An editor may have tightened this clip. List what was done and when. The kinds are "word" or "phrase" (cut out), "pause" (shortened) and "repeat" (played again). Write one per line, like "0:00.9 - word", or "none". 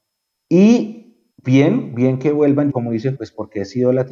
0:01.3 - pause
0:02.7 - word
0:03.1 - word